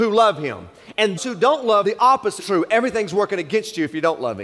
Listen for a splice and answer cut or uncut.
cut